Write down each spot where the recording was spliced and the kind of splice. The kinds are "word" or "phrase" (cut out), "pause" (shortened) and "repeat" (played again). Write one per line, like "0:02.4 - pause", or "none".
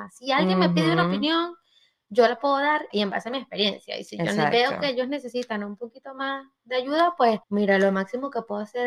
0:02.9 - word
0:07.4 - pause